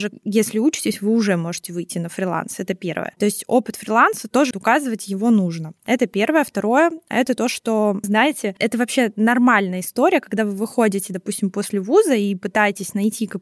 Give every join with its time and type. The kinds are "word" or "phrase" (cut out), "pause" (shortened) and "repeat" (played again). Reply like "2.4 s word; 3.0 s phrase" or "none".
4.5 s word; 8.0 s word